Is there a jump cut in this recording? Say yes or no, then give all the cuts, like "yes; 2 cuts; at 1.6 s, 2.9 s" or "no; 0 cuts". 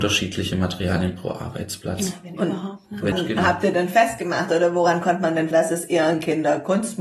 yes; 2 cuts; at 3.1 s, 5.5 s